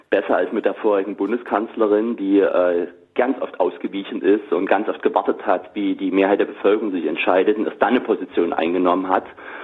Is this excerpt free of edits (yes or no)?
yes